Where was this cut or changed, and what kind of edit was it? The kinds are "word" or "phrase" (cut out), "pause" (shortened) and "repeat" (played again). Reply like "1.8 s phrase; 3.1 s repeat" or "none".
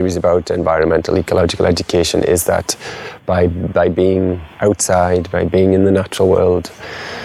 4.5 s pause